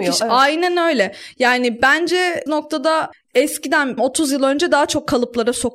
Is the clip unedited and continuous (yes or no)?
no